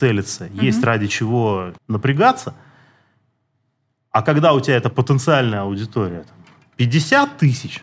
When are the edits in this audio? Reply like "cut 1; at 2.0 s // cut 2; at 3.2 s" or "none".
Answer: cut 1; at 1.8 s